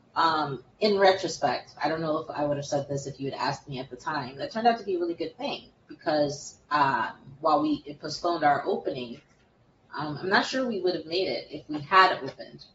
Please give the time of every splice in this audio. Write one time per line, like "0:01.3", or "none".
none